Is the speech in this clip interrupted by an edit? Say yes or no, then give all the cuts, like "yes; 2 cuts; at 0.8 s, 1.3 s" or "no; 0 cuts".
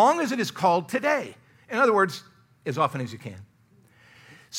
no; 0 cuts